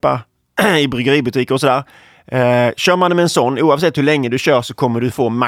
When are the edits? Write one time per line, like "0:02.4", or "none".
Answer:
none